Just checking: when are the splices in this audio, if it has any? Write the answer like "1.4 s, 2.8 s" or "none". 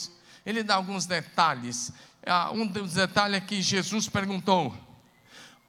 none